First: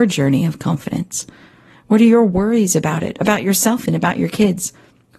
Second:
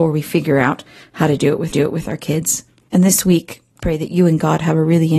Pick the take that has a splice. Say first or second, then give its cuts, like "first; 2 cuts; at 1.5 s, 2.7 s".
second; 2 cuts; at 1.7 s, 3.8 s